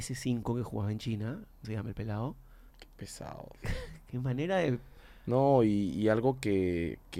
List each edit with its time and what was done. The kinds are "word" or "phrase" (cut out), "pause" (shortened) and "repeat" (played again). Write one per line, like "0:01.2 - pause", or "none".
0:01.6 - phrase
0:02.7 - pause